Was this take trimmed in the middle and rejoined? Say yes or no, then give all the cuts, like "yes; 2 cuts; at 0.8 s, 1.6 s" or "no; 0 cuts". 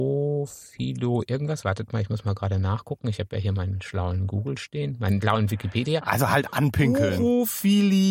no; 0 cuts